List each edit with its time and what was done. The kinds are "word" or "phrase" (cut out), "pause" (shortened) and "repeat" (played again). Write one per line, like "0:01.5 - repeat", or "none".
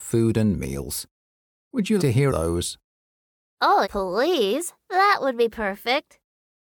0:02.0 - word
0:02.3 - phrase
0:03.8 - word